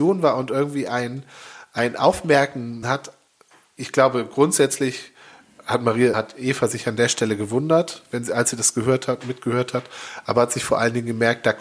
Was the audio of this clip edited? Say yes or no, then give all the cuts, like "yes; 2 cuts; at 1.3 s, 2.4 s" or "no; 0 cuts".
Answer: yes; 2 cuts; at 2.8 s, 6.1 s